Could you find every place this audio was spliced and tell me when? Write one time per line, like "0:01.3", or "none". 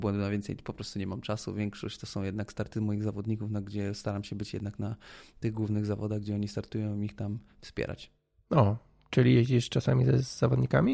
none

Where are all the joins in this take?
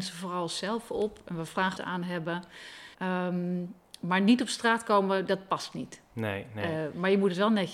0:01.8
0:02.9

